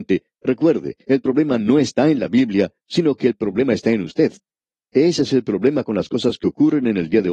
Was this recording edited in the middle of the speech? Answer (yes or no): no